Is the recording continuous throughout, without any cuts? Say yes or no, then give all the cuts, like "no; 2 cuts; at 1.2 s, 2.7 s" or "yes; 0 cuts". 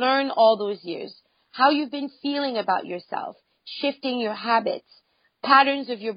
yes; 0 cuts